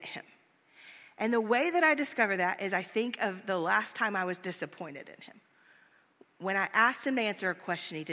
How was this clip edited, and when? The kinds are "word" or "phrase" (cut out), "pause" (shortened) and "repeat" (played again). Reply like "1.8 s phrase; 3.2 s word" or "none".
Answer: none